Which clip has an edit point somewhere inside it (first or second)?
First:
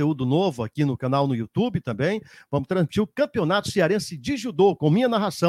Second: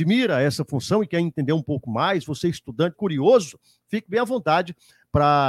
second